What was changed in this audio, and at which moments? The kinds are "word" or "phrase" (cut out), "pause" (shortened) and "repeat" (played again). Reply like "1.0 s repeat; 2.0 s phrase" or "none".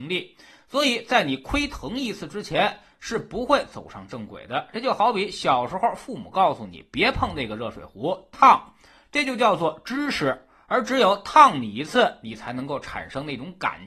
none